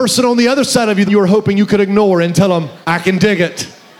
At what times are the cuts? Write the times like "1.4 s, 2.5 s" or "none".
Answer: 1.1 s, 2.8 s